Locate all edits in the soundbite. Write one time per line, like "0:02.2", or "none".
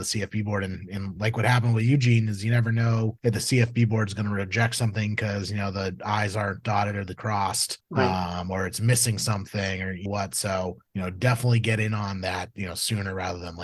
0:03.2
0:07.2
0:07.8
0:10.1
0:10.9

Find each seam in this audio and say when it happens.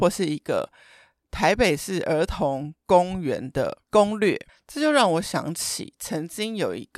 0:03.9
0:04.5

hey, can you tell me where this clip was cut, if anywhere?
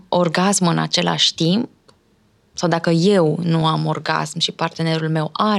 none

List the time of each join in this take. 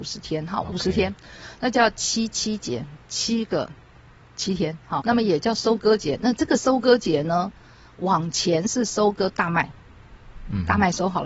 0:05.0

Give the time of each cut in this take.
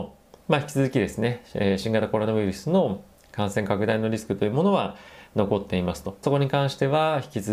0:06.2

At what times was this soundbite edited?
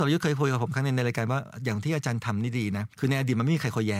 0:02.9

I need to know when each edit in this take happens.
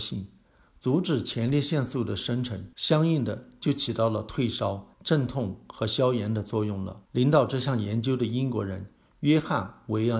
0:02.7
0:04.9
0:07.0

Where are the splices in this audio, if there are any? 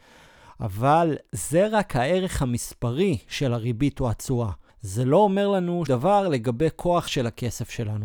0:04.7
0:05.9
0:07.1

